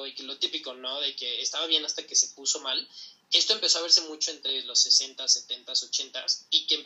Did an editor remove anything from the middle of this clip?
no; 0 cuts

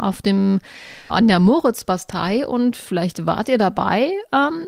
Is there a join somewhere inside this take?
yes; 1 cut; at 1.1 s

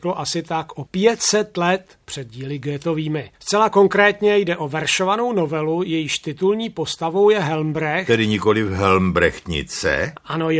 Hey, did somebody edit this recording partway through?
yes; 2 cuts; at 2.0 s, 3.4 s

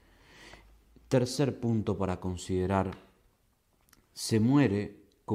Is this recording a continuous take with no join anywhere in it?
yes; 0 cuts

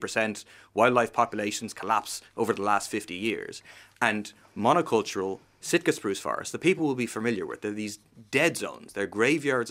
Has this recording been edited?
no; 0 cuts

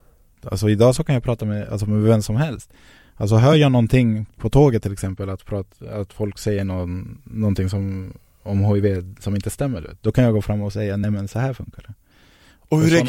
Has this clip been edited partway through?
no; 0 cuts

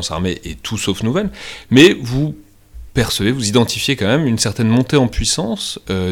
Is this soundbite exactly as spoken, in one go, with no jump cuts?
yes; 0 cuts

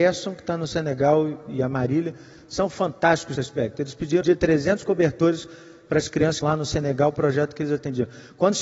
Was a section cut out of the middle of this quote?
yes; 3 cuts; at 3.4 s, 4.2 s, 6.4 s

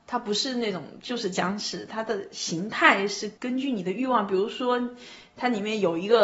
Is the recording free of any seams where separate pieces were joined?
no; 1 cut; at 3.4 s

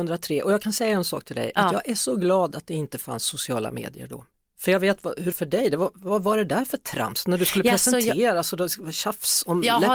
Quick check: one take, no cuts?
no; 1 cut; at 5.3 s

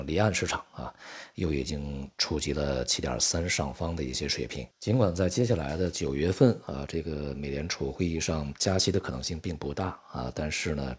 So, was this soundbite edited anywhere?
yes; 1 cut; at 4.7 s

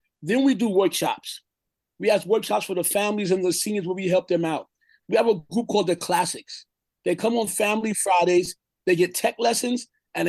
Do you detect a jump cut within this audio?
no; 0 cuts

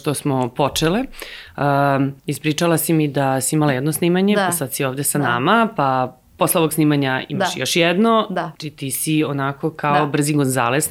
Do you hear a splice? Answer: yes; 2 cuts; at 2.2 s, 8.5 s

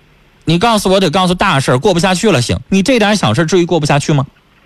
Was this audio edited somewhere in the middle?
yes; 1 cut; at 2.7 s

